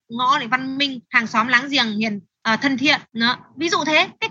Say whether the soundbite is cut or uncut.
cut